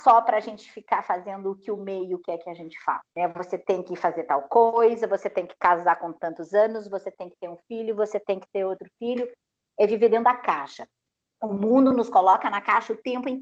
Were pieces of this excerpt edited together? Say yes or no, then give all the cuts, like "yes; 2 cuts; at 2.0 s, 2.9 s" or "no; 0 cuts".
yes; 1 cut; at 3.1 s